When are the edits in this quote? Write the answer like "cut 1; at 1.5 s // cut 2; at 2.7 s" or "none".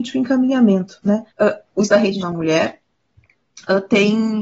cut 1; at 1.3 s // cut 2; at 1.9 s // cut 3; at 2.2 s